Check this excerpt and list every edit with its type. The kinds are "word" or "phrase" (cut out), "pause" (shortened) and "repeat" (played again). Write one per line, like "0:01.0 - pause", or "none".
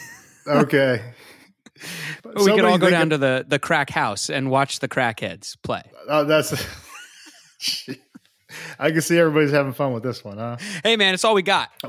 0:02.2 - pause

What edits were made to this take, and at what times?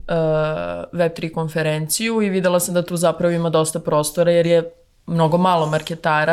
none

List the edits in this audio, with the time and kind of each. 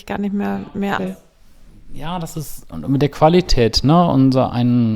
0:01.0 - word

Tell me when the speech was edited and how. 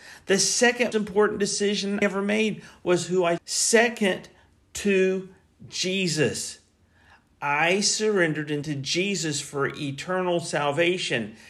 0:00.9 - word
0:02.0 - word
0:03.4 - phrase
0:08.6 - word

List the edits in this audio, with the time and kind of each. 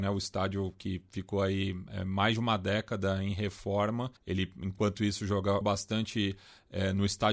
0:04.2 - pause
0:05.6 - word

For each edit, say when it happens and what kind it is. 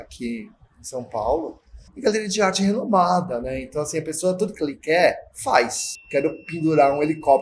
0:01.9 - pause
0:05.3 - pause

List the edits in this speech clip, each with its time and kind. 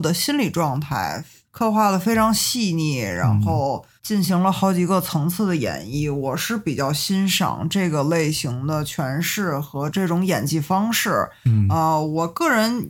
0:01.4 - pause
0:04.0 - pause

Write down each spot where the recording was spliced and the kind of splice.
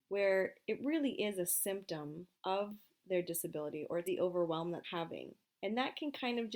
0:02.4 - pause
0:04.0 - phrase
0:04.8 - word

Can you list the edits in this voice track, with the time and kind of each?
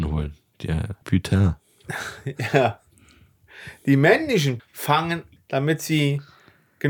0:01.0 - word
0:04.6 - word
0:05.4 - word

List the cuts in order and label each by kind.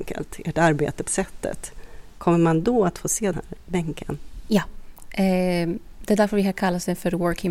0:01.1 - word
0:03.3 - word

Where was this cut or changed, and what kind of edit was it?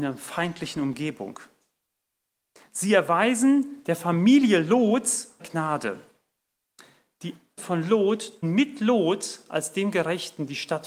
0:05.4 - word
0:07.6 - word
0:08.4 - word

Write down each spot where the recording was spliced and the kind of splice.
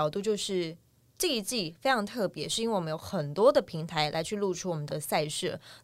0:04.9 - word

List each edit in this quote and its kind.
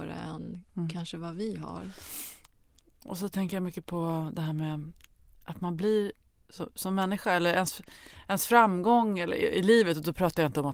none

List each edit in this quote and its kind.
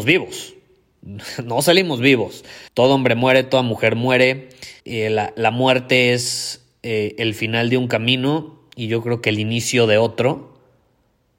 0:02.7 - pause
0:04.8 - pause

